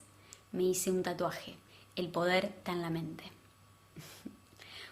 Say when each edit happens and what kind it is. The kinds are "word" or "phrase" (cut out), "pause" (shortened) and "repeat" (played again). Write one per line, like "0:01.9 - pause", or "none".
0:01.7 - pause
0:02.6 - word